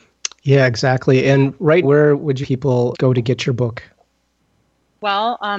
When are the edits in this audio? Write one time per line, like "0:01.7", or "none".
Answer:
0:01.8
0:02.4
0:02.9

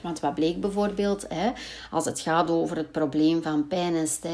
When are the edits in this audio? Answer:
none

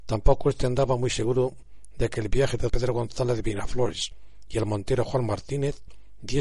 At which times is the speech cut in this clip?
0:02.7

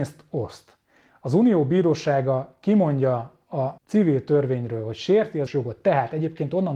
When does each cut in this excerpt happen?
0:03.8
0:05.5

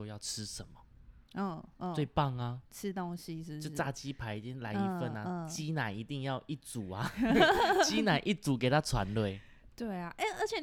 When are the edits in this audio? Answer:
0:02.7

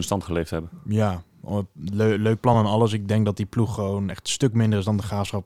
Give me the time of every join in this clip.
none

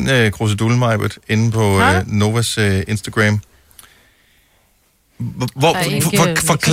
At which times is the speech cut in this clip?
none

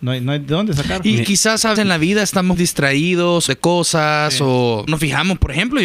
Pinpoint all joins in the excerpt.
0:01.2
0:01.8
0:02.5
0:03.5
0:04.9

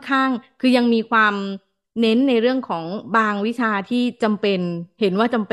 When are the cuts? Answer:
none

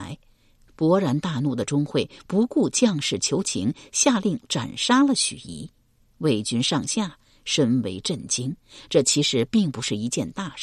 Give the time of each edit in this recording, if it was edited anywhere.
none

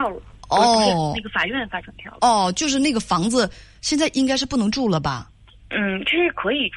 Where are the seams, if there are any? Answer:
0:05.5

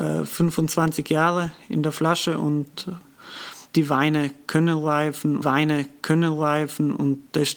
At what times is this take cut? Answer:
0:03.7
0:05.4

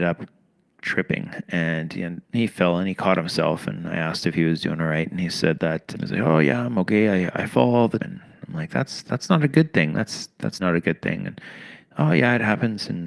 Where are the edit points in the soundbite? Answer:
0:05.9
0:08.0
0:10.6

